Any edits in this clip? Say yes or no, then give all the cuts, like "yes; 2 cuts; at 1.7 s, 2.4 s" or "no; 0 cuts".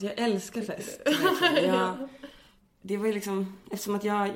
no; 0 cuts